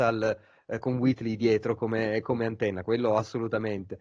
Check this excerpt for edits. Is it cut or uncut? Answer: uncut